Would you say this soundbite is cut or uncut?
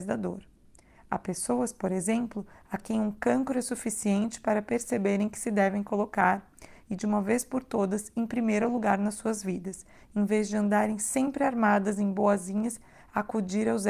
uncut